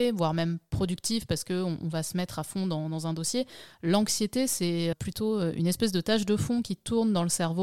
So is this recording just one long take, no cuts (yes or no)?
no